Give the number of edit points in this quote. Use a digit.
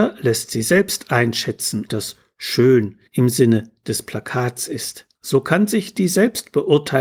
3